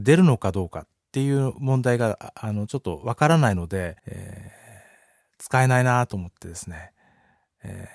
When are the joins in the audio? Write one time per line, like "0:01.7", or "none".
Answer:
0:04.0